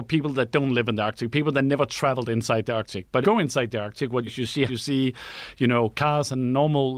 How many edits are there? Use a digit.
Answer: 3